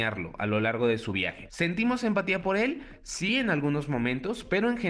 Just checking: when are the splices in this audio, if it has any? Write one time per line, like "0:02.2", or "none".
none